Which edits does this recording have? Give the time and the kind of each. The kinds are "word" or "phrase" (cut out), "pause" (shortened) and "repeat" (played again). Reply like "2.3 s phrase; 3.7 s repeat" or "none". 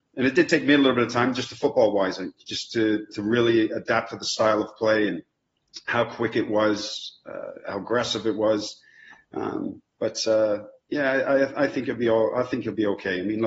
9.9 s pause